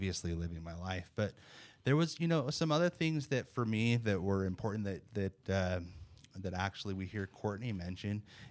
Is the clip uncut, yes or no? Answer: yes